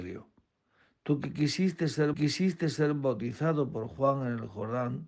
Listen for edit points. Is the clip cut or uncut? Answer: cut